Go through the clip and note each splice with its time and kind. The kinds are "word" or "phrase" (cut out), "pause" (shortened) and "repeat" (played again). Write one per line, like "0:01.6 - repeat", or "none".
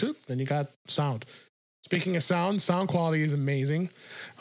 none